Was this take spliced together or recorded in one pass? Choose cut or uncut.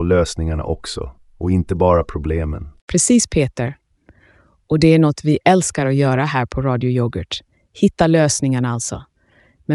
uncut